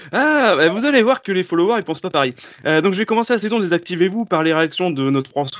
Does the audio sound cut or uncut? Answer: uncut